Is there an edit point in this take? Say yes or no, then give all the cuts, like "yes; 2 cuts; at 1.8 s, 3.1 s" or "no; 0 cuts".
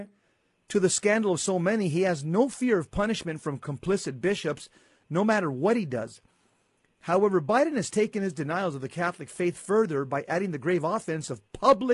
no; 0 cuts